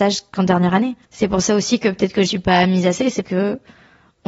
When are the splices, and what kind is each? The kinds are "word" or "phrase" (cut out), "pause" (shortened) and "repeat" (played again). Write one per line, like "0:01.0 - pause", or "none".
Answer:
0:01.0 - pause
0:02.3 - word
0:03.2 - word